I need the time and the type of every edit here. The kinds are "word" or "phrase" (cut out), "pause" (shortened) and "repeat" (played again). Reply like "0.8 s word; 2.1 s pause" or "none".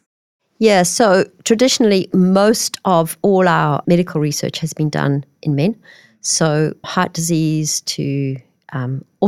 3.8 s word; 6.8 s word